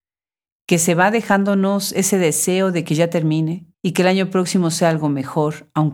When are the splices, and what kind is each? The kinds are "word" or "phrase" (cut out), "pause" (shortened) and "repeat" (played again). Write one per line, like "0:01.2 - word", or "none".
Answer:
0:03.7 - pause